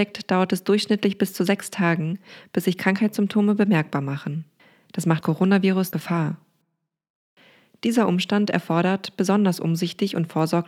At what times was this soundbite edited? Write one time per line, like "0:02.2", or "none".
0:04.6
0:05.2
0:05.9